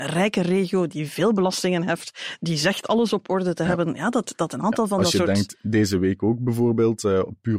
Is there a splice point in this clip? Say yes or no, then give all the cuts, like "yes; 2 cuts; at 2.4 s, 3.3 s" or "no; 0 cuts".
no; 0 cuts